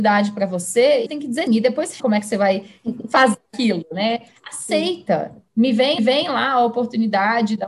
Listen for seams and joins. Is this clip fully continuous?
no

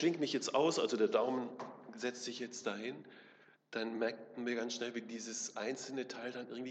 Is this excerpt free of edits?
yes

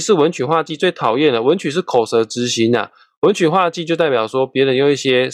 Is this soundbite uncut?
yes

